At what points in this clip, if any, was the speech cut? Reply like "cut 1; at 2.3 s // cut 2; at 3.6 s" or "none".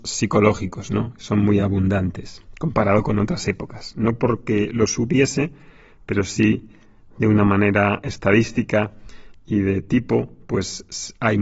none